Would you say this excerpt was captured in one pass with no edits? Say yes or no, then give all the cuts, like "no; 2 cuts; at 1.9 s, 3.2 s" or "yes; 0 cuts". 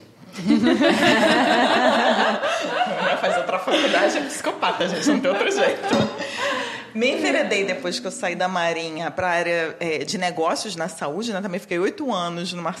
yes; 0 cuts